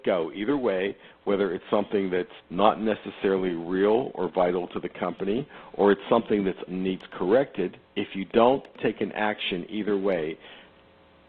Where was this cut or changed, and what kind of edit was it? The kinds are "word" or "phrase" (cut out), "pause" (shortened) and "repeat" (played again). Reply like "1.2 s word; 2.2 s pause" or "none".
2.4 s pause; 6.7 s word; 7.8 s pause